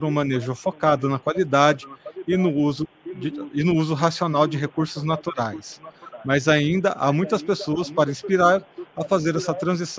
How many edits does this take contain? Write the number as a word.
zero